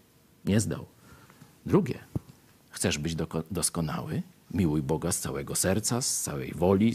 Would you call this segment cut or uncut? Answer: uncut